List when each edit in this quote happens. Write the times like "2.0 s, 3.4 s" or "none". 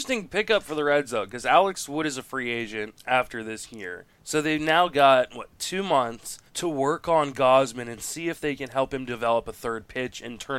4.1 s, 6.5 s

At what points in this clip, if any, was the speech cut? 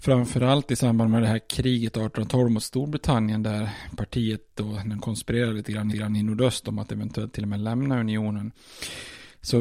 5.0 s, 5.9 s

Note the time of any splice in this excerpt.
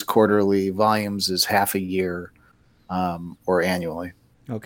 none

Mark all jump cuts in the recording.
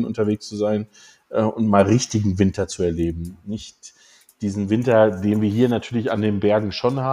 none

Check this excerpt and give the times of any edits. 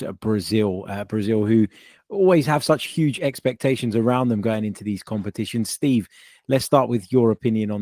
none

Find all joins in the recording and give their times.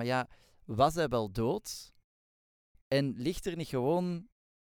none

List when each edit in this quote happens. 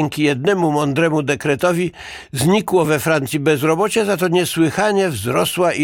none

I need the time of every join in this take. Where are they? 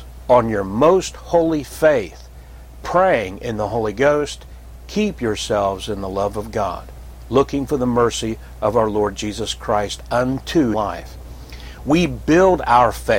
10.7 s

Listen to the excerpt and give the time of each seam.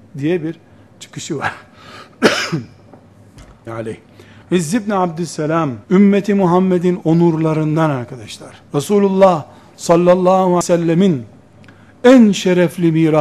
3.7 s, 5.8 s, 8.7 s, 10.6 s

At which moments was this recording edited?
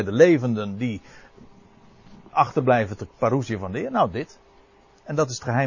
3.0 s

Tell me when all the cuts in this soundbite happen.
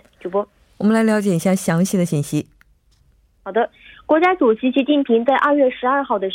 none

